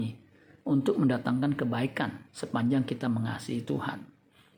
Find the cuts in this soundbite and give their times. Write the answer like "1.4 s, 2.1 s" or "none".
2.3 s